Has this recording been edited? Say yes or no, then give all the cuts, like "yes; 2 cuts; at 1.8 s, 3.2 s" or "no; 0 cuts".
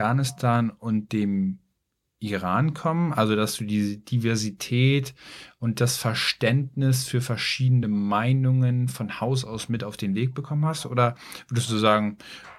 no; 0 cuts